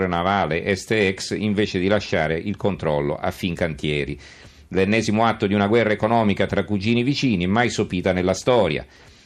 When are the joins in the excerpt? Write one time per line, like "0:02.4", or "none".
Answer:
none